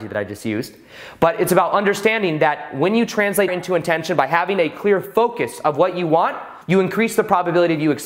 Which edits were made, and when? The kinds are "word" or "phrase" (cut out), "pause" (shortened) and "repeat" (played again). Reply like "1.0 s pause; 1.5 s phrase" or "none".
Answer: 3.5 s word; 6.6 s pause